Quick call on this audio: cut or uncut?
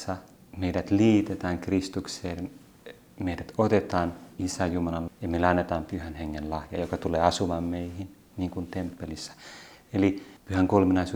cut